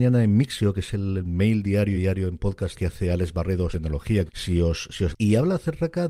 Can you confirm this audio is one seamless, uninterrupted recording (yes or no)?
no